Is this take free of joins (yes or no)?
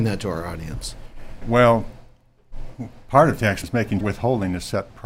no